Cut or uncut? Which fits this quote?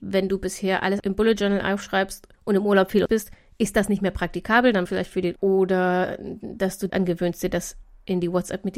cut